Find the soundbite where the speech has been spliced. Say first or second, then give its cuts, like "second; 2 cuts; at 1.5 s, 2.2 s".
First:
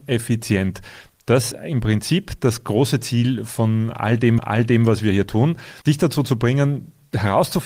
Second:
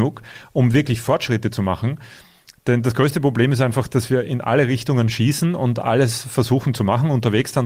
first; 3 cuts; at 1.5 s, 4.4 s, 5.8 s